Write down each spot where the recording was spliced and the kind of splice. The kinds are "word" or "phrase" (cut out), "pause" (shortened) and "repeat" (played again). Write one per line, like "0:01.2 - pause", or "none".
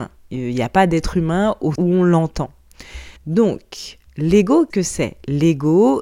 0:01.7 - word
0:03.2 - pause
0:04.7 - word